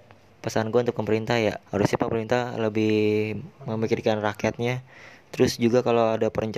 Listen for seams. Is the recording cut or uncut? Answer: cut